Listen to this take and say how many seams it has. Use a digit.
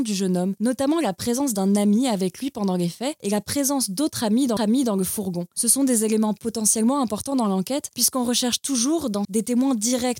2